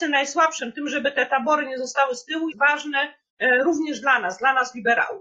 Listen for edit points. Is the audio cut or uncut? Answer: cut